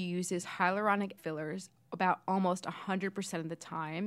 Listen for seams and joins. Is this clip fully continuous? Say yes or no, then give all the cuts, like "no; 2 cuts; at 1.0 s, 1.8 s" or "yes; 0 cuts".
no; 1 cut; at 1.2 s